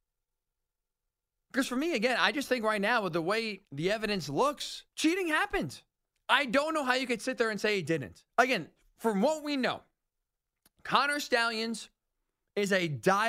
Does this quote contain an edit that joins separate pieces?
yes; 4 cuts; at 3.6 s, 4.9 s, 6.1 s, 8.3 s

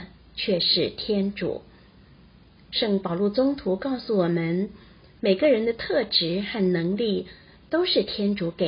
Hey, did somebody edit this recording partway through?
no; 0 cuts

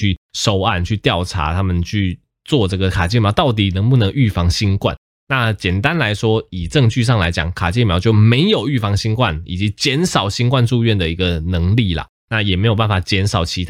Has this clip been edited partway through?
no; 0 cuts

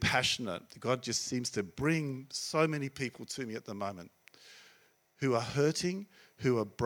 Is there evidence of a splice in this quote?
no; 0 cuts

